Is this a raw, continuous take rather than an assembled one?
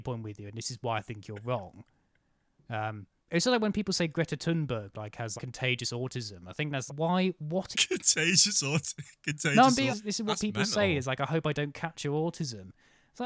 no; 5 cuts; at 3.2 s, 5.4 s, 6.9 s, 7.7 s, 9.9 s

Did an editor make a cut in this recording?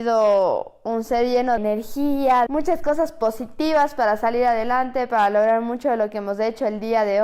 yes; 2 cuts; at 1.6 s, 2.5 s

